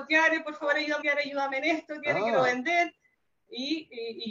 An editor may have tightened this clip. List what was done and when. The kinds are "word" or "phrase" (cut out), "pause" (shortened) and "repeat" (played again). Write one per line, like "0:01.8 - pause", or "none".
0:01.0 - phrase